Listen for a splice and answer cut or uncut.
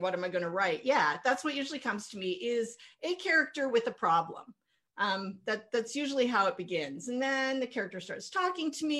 uncut